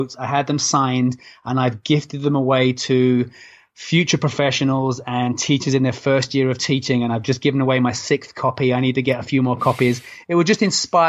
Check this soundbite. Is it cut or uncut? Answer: uncut